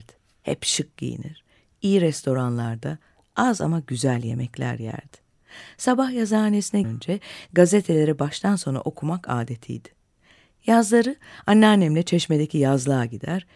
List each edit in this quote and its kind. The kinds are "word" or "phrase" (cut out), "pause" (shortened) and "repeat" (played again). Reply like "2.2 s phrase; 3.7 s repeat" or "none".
6.8 s word